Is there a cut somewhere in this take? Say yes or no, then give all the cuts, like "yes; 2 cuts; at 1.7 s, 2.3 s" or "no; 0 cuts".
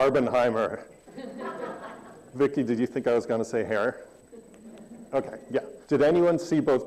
yes; 1 cut; at 5.8 s